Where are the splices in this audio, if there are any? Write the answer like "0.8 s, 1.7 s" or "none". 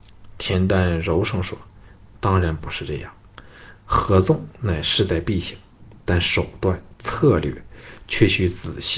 none

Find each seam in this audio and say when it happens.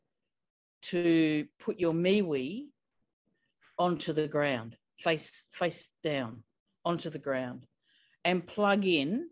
none

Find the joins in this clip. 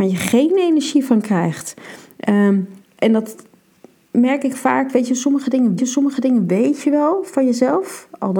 5.8 s

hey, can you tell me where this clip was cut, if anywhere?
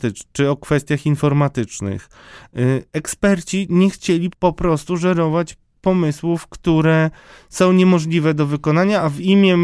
4.3 s

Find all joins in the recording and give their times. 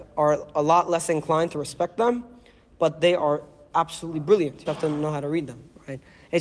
4.7 s

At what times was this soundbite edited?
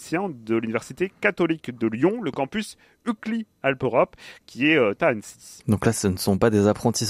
none

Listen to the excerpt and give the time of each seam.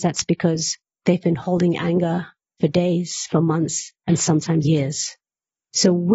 4.6 s

